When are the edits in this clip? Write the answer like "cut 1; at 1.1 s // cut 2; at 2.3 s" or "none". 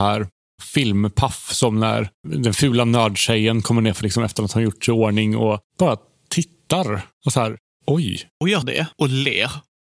cut 1; at 4.0 s // cut 2; at 5.7 s // cut 3; at 7.1 s // cut 4; at 8.3 s // cut 5; at 8.6 s

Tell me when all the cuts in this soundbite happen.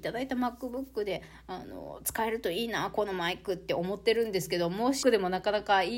cut 1; at 5.0 s

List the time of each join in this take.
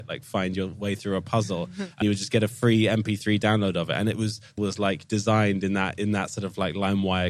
cut 1; at 2.0 s // cut 2; at 4.6 s

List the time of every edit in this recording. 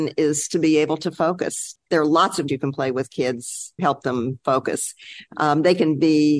cut 1; at 1.9 s // cut 2; at 2.5 s // cut 3; at 3.8 s

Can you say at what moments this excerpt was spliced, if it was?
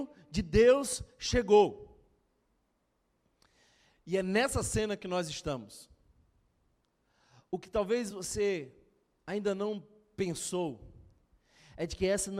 none

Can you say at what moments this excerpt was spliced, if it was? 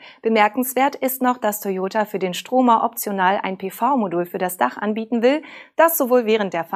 none

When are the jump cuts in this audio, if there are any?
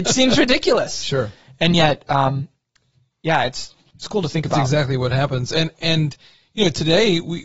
none

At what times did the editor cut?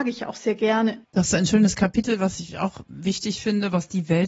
cut 1; at 1.0 s

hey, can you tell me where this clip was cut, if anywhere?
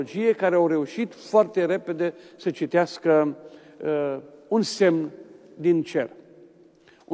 none

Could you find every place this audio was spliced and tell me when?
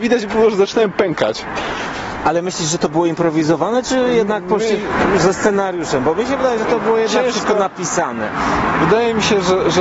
none

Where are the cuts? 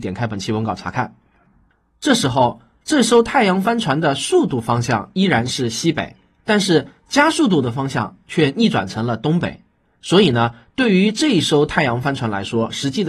none

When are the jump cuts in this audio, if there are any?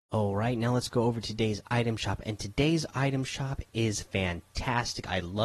none

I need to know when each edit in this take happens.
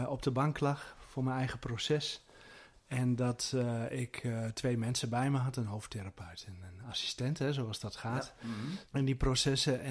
cut 1; at 8.9 s

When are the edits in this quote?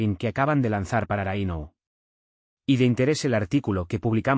none

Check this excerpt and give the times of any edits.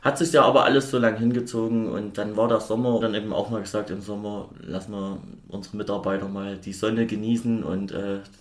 cut 1; at 3.0 s

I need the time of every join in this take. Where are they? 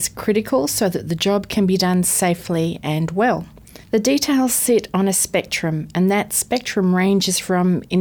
cut 1; at 3.8 s

